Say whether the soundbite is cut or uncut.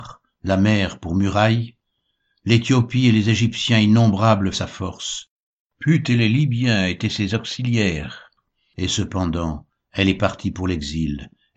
cut